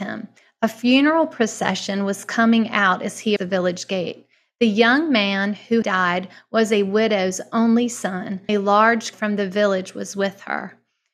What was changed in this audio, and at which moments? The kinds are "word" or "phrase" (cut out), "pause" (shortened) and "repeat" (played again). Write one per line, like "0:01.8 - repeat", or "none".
0:03.4 - word
0:05.8 - word
0:08.5 - word
0:09.1 - word